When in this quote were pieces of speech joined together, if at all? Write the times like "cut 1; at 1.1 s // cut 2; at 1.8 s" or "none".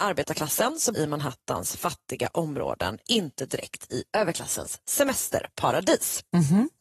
cut 1; at 0.9 s